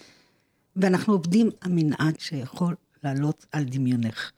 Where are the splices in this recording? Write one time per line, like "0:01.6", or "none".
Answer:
0:01.6
0:02.2

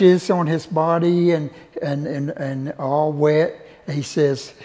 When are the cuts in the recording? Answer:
none

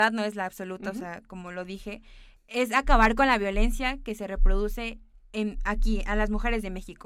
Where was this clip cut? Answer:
none

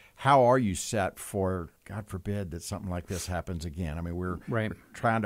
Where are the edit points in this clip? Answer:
0:01.8

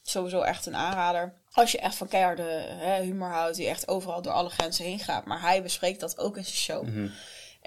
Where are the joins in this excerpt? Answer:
0:01.4

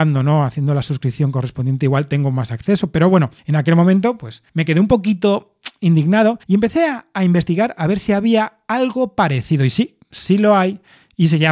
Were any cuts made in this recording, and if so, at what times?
0:03.4
0:04.5
0:06.4

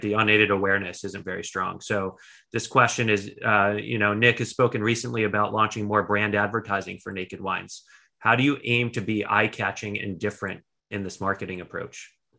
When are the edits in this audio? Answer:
none

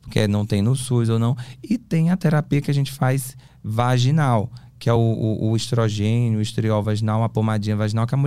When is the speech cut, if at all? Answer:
none

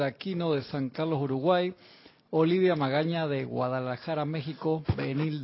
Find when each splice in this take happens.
none

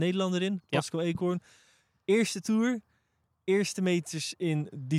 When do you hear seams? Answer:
none

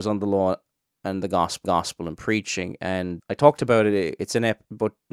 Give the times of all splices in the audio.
0:01.6
0:03.2

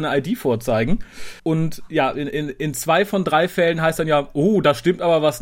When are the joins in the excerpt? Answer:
0:01.4

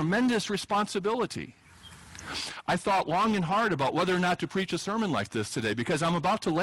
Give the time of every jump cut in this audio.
none

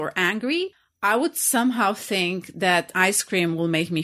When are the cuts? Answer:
0:02.9

